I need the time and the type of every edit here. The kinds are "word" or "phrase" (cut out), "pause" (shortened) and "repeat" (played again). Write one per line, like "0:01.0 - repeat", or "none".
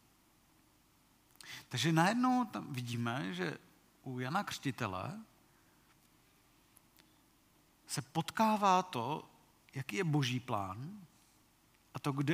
none